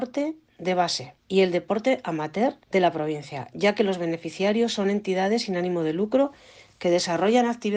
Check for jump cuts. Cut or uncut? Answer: cut